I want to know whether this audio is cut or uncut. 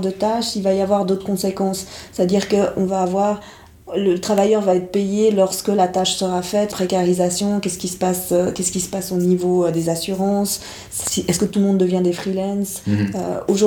cut